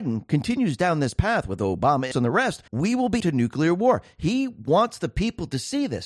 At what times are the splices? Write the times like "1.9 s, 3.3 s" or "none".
2.1 s, 2.7 s, 3.2 s